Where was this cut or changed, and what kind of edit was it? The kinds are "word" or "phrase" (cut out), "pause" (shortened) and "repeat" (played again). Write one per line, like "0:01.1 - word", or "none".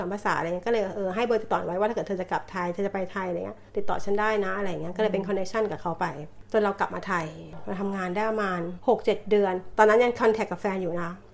0:03.7 - pause